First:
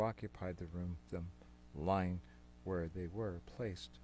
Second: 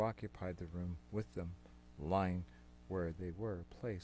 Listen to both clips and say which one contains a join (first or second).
first